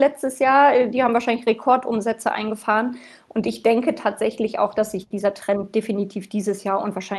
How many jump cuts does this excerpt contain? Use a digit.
0